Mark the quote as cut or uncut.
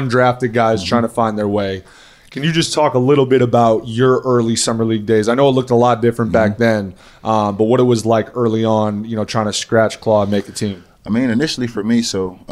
uncut